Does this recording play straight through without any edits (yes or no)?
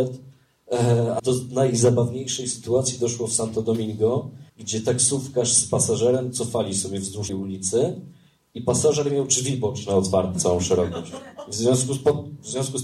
no